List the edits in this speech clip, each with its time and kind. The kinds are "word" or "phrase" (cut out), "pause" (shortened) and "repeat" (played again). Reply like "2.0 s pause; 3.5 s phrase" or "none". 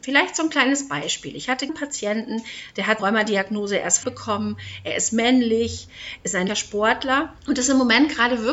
1.7 s word; 3.0 s word; 4.0 s phrase; 6.5 s word; 7.4 s pause

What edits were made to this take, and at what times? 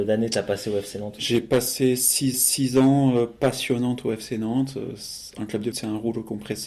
2.3 s repeat; 5.7 s word

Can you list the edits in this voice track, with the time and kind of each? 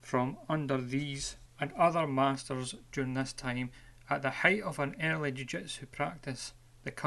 none

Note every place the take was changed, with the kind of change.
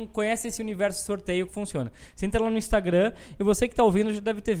1.5 s word

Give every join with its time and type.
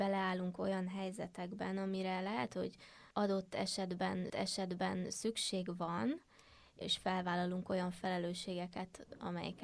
3.1 s pause; 4.3 s repeat; 6.8 s word

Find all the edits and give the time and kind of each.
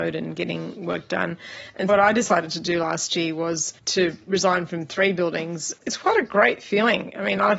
1.9 s word; 3.8 s pause; 5.8 s pause

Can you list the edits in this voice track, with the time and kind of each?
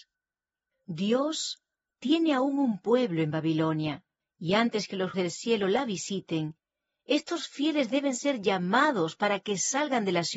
5.1 s word

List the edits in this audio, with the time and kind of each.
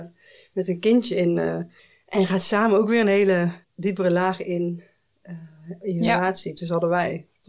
1.8 s pause; 3.6 s pause

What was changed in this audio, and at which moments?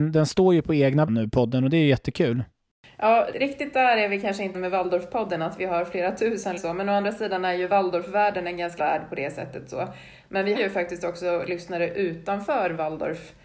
1.1 s word; 3.3 s word; 4.5 s word; 6.6 s word; 8.8 s word; 10.6 s word

